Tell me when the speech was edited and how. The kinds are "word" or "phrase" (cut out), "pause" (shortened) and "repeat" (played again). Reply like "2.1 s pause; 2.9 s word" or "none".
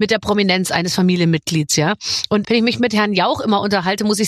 2.4 s word